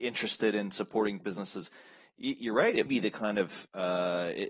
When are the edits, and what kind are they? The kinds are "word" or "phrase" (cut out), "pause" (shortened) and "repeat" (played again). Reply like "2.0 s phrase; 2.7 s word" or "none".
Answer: 1.2 s word; 2.9 s word